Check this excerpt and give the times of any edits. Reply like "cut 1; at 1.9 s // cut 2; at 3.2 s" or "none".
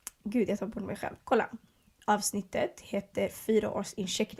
cut 1; at 1.2 s // cut 2; at 2.0 s